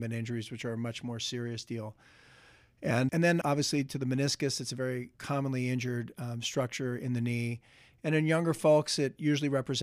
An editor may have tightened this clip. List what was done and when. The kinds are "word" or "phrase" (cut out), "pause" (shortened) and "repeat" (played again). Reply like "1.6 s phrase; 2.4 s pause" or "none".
3.1 s word; 3.4 s word; 5.1 s word